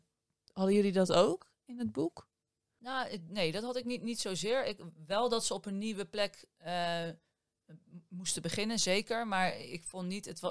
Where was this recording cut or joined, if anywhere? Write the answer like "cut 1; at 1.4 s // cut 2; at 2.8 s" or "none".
none